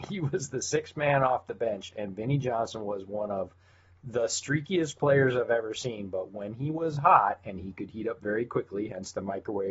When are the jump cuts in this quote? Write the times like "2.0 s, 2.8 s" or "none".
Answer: none